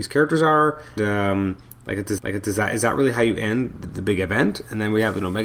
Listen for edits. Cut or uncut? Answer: cut